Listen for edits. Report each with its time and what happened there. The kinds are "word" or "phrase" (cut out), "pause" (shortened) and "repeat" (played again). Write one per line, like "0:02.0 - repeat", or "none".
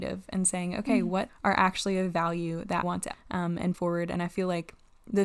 0:01.3 - word
0:02.8 - word
0:03.1 - word
0:03.7 - word